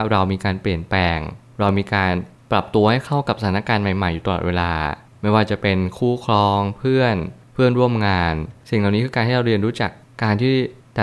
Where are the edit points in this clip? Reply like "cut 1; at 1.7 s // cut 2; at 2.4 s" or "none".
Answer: none